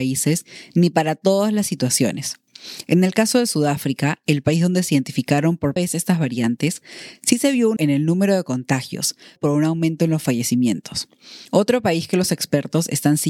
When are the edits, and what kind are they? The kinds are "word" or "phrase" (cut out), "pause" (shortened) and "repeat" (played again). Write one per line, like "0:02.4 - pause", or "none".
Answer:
0:05.8 - word
0:07.8 - word
0:09.4 - phrase
0:11.5 - pause